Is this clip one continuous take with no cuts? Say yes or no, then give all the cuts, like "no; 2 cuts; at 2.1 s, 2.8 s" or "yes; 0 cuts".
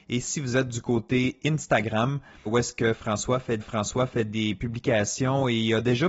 no; 2 cuts; at 2.5 s, 3.6 s